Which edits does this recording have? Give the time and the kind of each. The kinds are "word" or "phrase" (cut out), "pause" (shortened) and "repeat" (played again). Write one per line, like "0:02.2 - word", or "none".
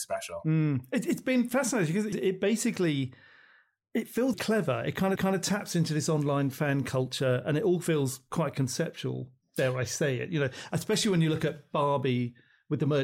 0:02.1 - phrase
0:04.3 - word
0:05.2 - repeat